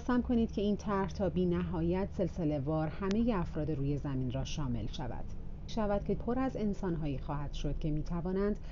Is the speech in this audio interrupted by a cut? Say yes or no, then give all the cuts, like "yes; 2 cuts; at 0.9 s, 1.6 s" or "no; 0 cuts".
yes; 2 cuts; at 5.7 s, 6.2 s